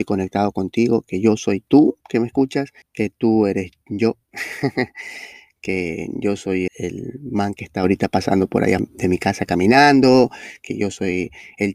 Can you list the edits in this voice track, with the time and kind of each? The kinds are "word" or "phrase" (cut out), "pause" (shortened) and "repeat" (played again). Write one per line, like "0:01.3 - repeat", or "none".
0:02.0 - pause
0:02.8 - pause
0:06.7 - word
0:08.8 - word